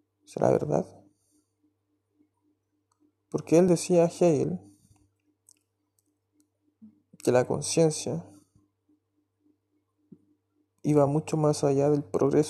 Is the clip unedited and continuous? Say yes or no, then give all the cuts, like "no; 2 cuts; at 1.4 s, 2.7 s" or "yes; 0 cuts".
yes; 0 cuts